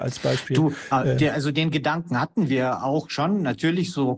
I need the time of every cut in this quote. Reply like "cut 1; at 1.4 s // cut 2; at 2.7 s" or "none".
none